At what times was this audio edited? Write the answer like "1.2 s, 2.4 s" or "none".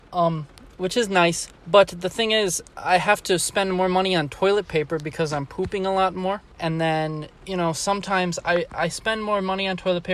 1.6 s, 2.7 s, 6.5 s, 7.3 s

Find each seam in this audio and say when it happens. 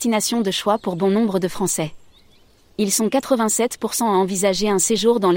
none

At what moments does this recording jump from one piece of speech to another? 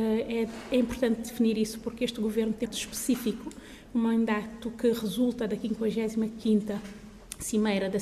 2.7 s

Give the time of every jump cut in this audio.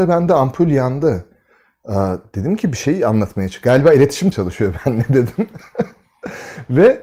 4.3 s

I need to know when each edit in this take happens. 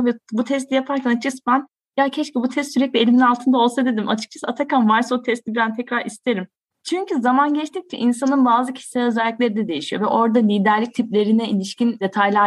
none

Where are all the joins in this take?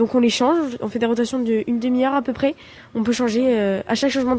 none

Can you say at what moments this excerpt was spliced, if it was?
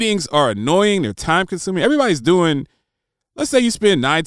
none

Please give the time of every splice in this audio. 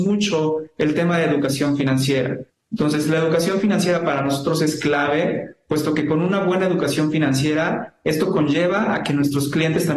2.5 s

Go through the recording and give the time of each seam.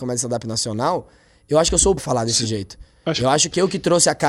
2.0 s

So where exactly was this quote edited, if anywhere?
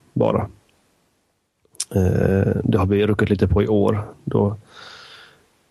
none

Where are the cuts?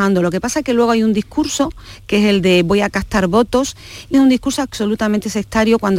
4.1 s

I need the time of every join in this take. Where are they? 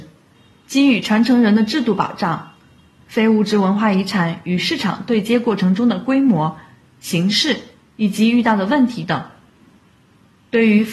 none

